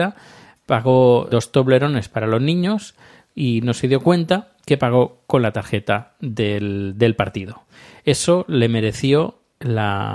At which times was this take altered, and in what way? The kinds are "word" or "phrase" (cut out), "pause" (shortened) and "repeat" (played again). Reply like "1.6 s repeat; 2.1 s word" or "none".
1.3 s word